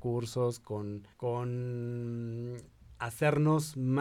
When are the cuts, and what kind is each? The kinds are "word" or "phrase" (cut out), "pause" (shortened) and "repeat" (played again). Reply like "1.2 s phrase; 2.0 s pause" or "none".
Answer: 1.1 s pause